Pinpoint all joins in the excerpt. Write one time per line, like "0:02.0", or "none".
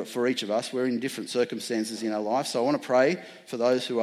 none